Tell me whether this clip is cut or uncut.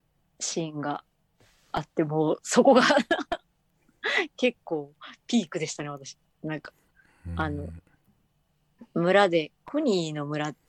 uncut